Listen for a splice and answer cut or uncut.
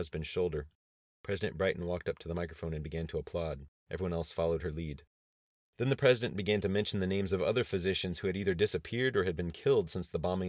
uncut